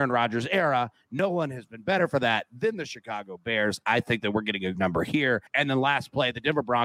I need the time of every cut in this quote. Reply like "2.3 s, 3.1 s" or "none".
4.8 s, 5.5 s